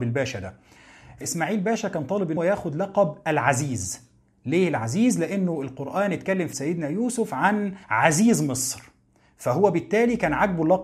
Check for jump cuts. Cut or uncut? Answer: cut